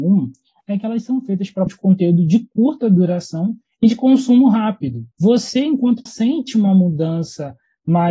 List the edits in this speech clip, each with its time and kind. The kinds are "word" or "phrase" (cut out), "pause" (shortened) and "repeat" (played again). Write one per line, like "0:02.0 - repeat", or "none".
0:01.7 - word
0:05.1 - pause
0:06.1 - phrase